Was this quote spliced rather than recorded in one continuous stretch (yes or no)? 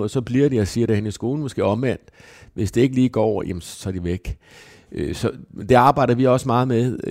no